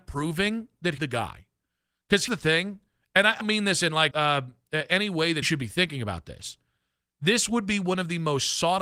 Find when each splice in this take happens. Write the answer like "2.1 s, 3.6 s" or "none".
1.0 s, 2.3 s, 3.4 s, 4.1 s, 5.4 s